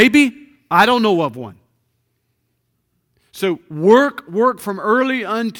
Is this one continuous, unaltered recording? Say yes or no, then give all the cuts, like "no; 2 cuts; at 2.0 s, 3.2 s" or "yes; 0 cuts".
yes; 0 cuts